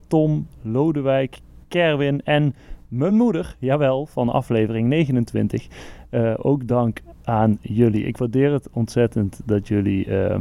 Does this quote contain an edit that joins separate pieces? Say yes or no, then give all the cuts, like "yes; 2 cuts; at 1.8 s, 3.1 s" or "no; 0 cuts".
no; 0 cuts